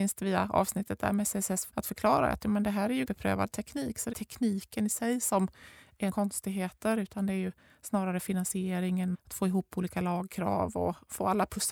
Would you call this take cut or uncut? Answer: cut